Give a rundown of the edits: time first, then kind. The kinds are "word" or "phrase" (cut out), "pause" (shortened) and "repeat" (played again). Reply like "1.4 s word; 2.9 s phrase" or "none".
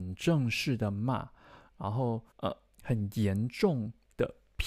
2.3 s pause